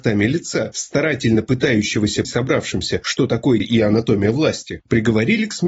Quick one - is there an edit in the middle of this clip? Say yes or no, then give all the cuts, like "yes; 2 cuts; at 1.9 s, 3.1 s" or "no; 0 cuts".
yes; 2 cuts; at 2.2 s, 3.6 s